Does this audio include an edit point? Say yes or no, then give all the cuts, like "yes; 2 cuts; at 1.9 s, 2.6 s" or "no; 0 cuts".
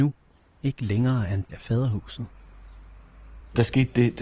yes; 1 cut; at 1.5 s